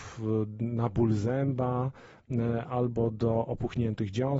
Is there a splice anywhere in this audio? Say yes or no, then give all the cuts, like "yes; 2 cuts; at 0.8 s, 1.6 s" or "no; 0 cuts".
no; 0 cuts